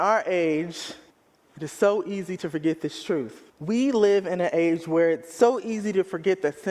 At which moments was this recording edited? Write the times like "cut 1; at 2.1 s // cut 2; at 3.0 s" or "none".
cut 1; at 1.1 s // cut 2; at 3.5 s